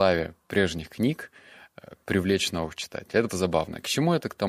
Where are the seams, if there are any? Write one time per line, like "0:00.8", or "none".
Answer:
0:03.3